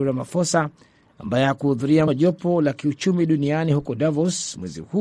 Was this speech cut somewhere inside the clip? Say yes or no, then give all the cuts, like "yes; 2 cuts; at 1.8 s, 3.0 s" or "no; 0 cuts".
yes; 1 cut; at 2.1 s